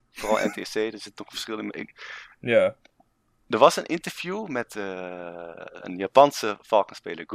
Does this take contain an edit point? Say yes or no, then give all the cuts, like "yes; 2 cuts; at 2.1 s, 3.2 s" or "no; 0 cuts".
no; 0 cuts